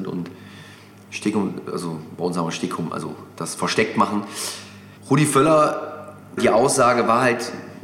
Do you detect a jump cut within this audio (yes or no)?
yes